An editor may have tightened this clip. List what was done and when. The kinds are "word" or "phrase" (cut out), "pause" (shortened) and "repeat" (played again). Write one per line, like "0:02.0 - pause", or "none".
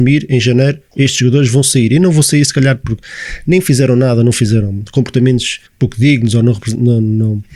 0:05.7 - pause